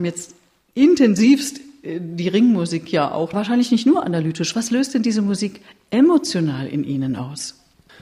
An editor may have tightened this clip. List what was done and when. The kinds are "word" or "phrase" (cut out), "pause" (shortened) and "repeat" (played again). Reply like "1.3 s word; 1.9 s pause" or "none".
3.3 s phrase